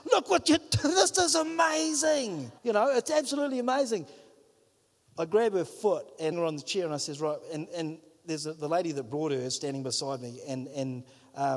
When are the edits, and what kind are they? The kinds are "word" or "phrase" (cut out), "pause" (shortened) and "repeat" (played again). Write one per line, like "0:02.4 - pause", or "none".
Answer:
0:02.6 - pause
0:06.3 - phrase